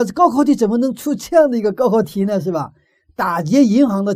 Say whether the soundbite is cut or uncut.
uncut